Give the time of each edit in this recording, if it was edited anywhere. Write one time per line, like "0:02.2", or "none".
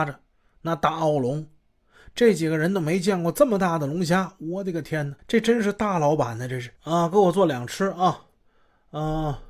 0:05.2
0:06.8